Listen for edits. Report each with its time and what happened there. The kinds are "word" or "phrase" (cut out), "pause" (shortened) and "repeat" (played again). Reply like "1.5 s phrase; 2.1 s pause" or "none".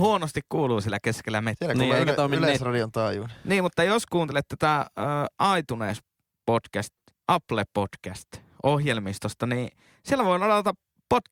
none

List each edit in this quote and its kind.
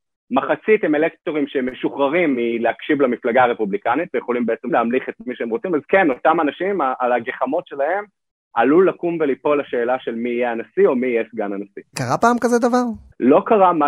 none

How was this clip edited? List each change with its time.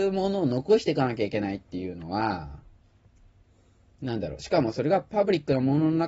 none

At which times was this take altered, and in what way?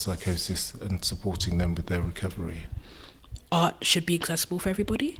none

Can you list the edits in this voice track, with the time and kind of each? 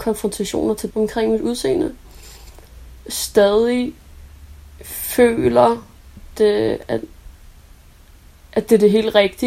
0.9 s word; 6.3 s word

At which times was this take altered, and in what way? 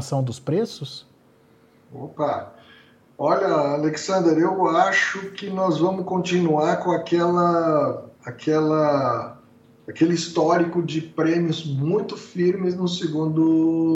8.1 s pause

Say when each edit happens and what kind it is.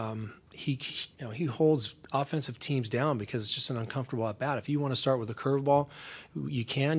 1.1 s pause

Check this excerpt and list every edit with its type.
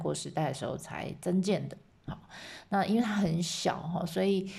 none

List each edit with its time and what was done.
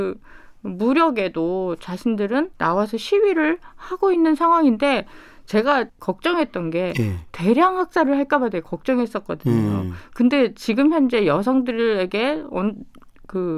2.5 s pause; 5.9 s word

